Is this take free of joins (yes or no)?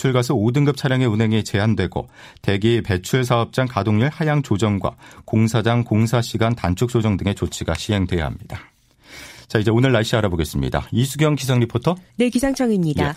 no